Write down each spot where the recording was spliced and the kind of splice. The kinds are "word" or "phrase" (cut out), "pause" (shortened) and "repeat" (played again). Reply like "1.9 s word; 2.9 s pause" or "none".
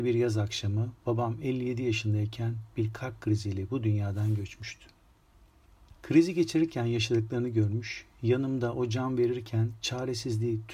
6.0 s pause

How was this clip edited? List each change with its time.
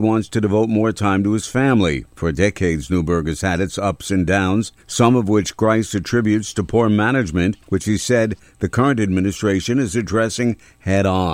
2.1 s pause; 4.8 s pause; 7.6 s pause

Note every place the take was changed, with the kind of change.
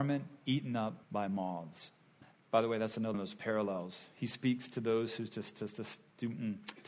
1.0 s pause; 2.2 s pause; 3.1 s word

